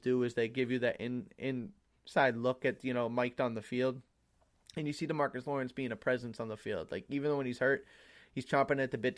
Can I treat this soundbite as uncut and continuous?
yes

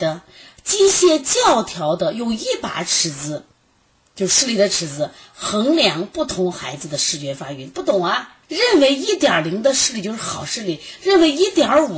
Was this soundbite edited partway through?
yes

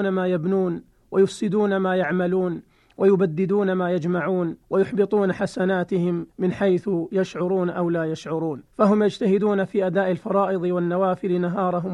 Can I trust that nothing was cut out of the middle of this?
no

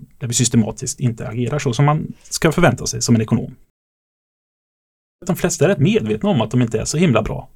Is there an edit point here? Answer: no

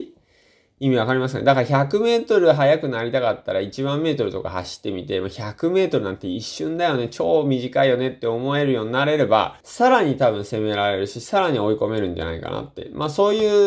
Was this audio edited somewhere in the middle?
yes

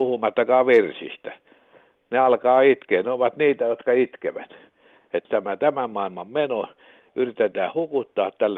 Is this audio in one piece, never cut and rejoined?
yes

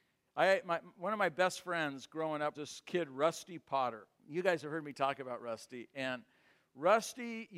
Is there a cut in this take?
yes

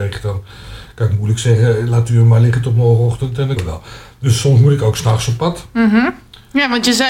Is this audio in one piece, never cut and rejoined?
no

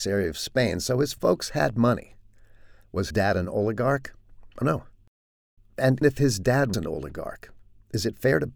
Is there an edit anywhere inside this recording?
yes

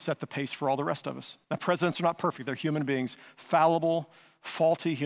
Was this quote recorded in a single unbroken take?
no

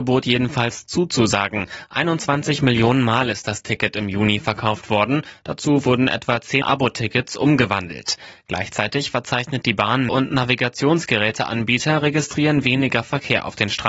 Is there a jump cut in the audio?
yes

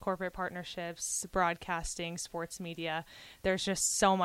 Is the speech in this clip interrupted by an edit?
no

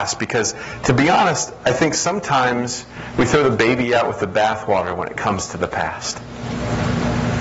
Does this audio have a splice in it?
no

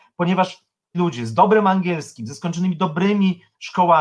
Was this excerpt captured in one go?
no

